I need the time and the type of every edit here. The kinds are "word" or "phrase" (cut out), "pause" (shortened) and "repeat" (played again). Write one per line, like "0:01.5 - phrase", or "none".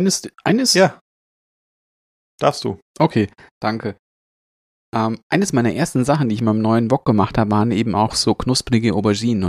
none

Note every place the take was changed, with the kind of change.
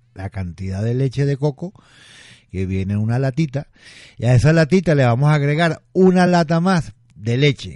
none

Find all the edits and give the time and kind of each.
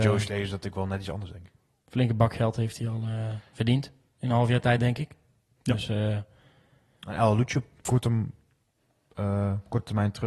none

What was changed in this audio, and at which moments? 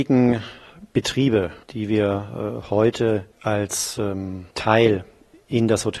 0:01.6 - pause
0:04.5 - pause

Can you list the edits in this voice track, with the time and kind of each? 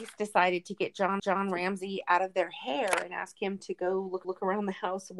0:01.2 - repeat
0:04.2 - repeat

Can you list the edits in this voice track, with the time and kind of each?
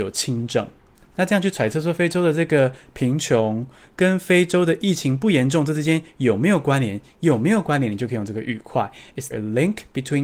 0:09.3 - word

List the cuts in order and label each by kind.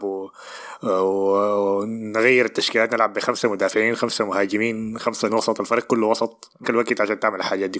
0:05.3 - word
0:06.6 - word

